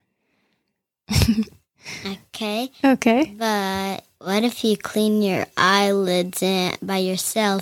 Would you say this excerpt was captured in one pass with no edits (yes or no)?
yes